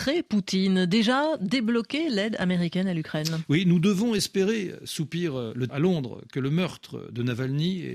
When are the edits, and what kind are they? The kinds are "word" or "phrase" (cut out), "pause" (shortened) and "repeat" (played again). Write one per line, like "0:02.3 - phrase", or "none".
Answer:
0:05.7 - word